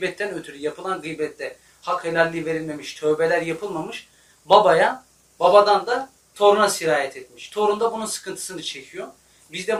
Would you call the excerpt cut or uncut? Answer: uncut